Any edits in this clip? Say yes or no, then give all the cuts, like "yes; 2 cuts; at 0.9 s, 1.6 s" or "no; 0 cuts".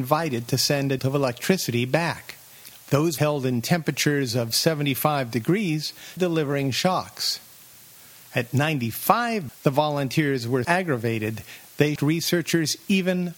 yes; 6 cuts; at 1.0 s, 3.2 s, 6.2 s, 9.5 s, 10.6 s, 12.0 s